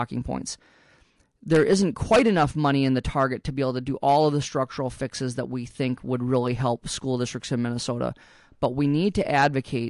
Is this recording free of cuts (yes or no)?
yes